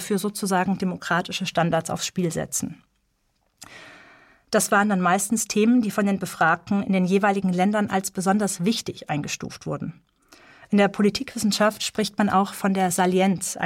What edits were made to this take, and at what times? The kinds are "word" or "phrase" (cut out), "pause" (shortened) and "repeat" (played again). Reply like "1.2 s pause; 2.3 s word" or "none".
none